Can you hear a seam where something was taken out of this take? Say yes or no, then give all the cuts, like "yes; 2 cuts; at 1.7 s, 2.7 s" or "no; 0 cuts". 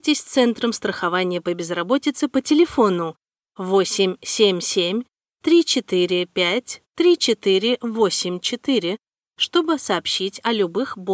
no; 0 cuts